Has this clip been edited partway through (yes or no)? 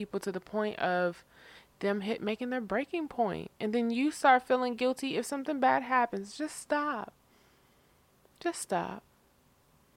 no